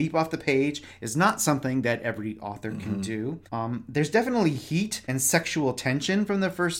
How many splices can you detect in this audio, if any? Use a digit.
2